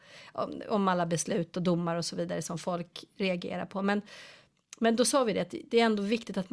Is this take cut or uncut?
uncut